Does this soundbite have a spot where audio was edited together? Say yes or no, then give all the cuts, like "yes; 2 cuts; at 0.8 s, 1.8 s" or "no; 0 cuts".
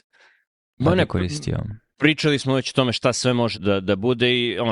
yes; 1 cut; at 3.5 s